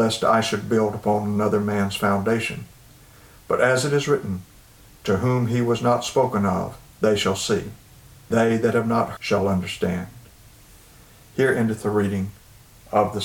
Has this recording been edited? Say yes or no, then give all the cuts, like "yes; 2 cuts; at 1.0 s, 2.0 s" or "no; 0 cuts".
yes; 3 cuts; at 6.9 s, 8.3 s, 9.2 s